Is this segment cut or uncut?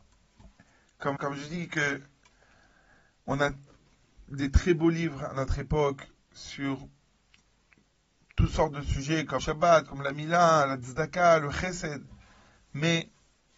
cut